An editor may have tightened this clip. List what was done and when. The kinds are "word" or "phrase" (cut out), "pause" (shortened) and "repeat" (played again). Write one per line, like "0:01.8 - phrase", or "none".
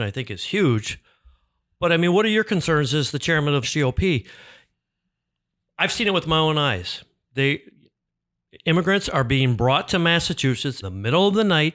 0:03.6 - word
0:10.8 - word